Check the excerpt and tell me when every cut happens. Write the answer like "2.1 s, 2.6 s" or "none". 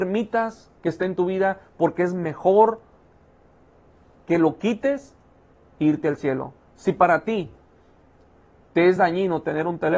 none